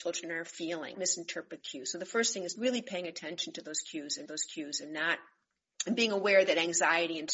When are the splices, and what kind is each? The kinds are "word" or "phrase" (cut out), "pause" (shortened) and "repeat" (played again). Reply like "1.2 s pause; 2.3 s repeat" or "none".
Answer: 0.9 s word; 1.6 s word; 2.6 s word; 4.3 s repeat